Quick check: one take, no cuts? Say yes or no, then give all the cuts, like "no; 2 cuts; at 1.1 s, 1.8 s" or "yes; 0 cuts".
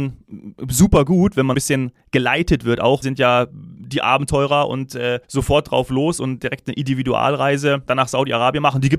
no; 4 cuts; at 1.5 s, 3.0 s, 5.2 s, 7.9 s